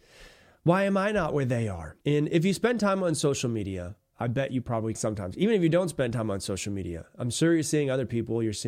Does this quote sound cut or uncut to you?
cut